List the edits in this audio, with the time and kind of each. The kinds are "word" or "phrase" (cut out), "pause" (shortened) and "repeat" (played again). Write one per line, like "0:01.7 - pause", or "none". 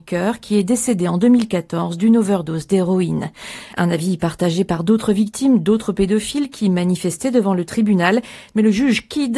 none